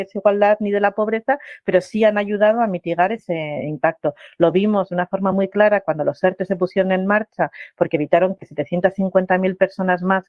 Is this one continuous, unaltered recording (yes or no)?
yes